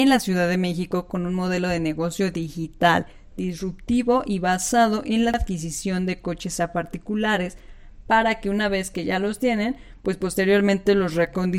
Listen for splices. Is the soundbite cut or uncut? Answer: uncut